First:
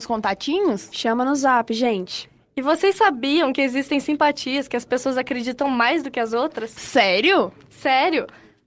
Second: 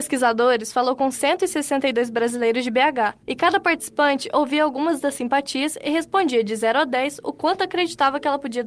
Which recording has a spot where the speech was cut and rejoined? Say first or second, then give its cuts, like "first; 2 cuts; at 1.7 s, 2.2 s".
second; 1 cut; at 3.2 s